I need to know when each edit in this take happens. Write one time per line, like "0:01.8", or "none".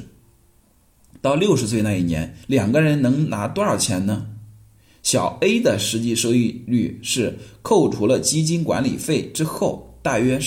0:02.4